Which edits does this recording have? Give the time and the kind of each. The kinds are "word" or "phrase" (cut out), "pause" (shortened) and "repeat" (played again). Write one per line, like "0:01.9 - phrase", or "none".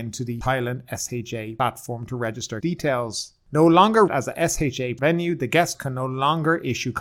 0:02.6 - word
0:04.1 - word
0:05.0 - word
0:05.7 - word

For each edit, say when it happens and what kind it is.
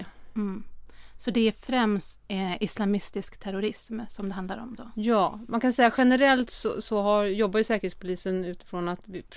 none

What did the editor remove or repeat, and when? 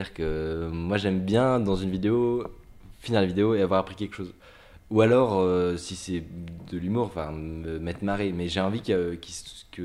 none

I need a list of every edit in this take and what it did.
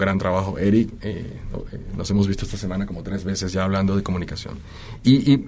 none

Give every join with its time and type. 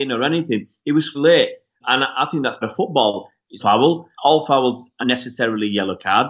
0:01.1 - word
0:01.8 - word
0:02.6 - word
0:03.6 - word
0:04.1 - pause
0:05.0 - word

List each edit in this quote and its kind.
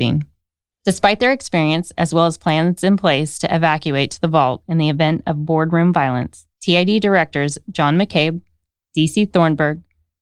0:06.5 - pause

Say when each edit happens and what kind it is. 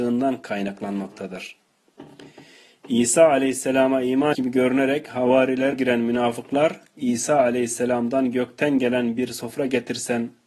0:04.3 - word
0:05.7 - word

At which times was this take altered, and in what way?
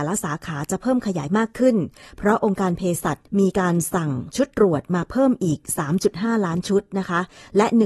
0:03.3 - pause

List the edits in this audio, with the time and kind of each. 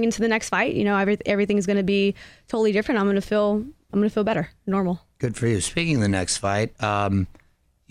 0:03.9 - word

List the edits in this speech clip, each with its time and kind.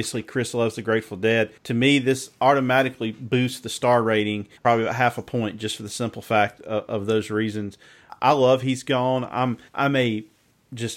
0:01.6 - pause
0:04.6 - pause
0:09.7 - pause

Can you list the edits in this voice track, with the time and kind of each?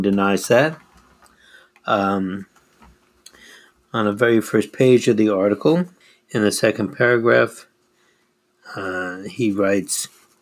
0:06.0 - pause

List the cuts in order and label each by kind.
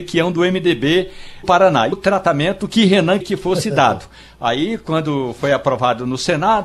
0:01.4 - word
0:01.9 - phrase
0:03.2 - word

